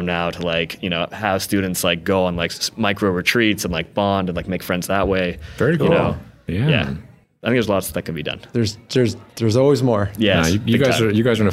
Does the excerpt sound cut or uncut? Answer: uncut